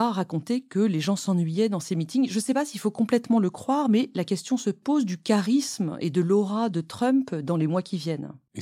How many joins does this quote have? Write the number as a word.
zero